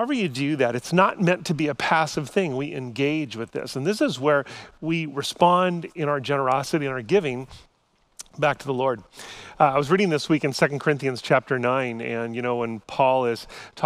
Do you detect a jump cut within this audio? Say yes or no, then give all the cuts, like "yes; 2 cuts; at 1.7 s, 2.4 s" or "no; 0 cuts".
no; 0 cuts